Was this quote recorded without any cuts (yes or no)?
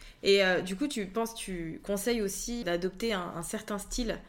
no